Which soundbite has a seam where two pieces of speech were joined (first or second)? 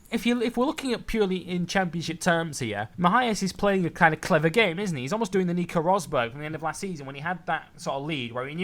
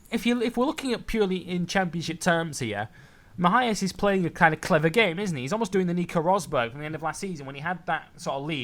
first